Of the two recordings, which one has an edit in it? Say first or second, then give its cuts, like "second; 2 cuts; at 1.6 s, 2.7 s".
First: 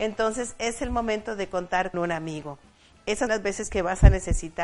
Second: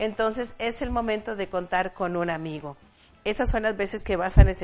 first; 2 cuts; at 1.9 s, 3.3 s